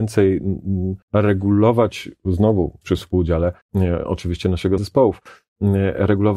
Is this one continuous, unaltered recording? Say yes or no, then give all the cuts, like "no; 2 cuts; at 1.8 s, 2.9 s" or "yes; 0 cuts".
no; 4 cuts; at 1.0 s, 2.8 s, 3.6 s, 4.8 s